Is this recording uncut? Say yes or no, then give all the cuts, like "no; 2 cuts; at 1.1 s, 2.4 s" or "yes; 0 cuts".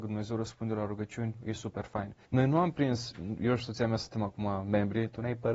no; 1 cut; at 2.2 s